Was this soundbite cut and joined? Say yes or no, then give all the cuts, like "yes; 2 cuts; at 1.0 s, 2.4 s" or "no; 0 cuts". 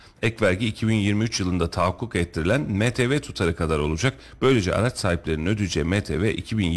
no; 0 cuts